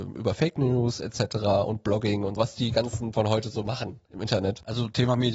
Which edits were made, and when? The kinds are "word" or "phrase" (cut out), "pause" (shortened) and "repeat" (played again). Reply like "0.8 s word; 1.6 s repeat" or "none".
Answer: 2.4 s word; 3.1 s word